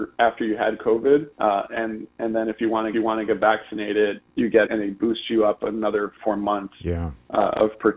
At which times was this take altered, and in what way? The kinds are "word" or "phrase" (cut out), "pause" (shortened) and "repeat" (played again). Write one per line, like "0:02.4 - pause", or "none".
0:01.3 - pause
0:02.9 - repeat
0:04.3 - word
0:04.7 - word
0:06.2 - phrase